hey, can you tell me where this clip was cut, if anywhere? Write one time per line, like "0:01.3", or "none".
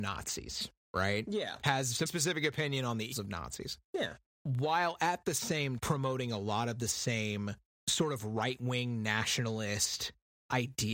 0:02.1
0:03.1
0:05.8